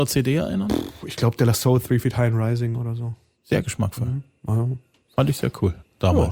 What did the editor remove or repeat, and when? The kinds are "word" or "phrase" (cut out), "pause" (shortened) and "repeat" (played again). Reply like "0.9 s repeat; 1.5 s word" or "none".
none